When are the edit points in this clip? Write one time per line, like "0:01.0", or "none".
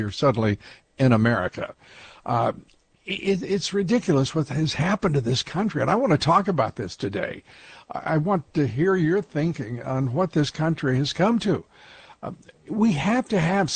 none